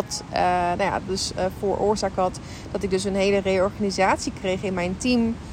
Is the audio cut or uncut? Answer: uncut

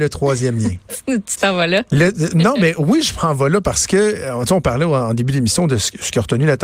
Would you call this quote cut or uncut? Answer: uncut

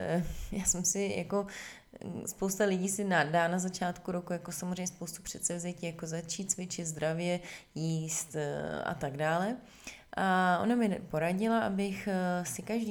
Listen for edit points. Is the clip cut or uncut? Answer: uncut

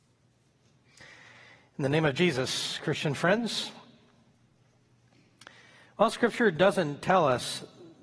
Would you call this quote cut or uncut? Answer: uncut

